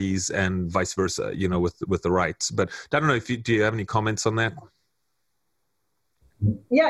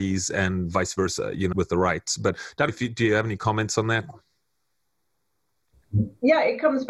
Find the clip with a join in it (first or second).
second